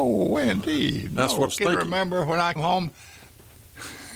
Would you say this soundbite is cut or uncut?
cut